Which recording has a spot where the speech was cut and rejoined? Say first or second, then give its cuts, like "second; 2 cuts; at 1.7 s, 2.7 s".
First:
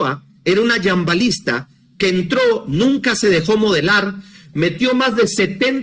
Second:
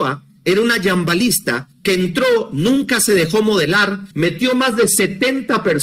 second; 2 cuts; at 1.7 s, 4.1 s